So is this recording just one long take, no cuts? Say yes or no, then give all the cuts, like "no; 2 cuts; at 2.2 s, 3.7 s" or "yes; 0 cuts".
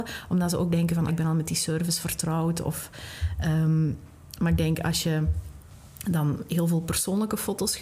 no; 1 cut; at 1.1 s